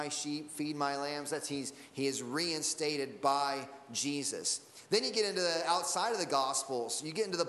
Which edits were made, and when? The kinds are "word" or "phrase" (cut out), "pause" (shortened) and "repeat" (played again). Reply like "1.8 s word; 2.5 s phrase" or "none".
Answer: none